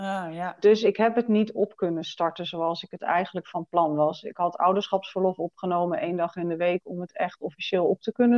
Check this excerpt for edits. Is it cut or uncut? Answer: uncut